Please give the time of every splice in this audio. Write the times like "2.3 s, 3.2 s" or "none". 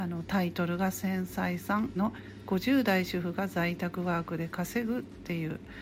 2.0 s